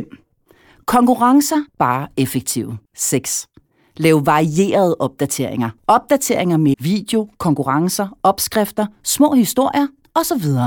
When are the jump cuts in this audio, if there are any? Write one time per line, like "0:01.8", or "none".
0:01.7
0:02.9
0:05.8
0:06.7